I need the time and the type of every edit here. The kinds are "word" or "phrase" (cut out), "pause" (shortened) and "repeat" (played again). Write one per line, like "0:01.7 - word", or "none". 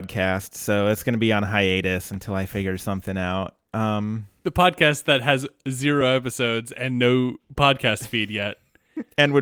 none